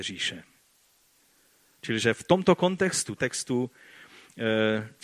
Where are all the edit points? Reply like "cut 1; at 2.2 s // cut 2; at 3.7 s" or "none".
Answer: cut 1; at 3.2 s